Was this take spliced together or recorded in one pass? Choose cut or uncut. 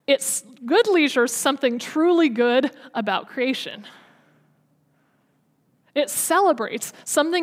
cut